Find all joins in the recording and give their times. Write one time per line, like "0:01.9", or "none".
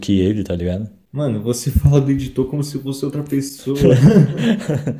none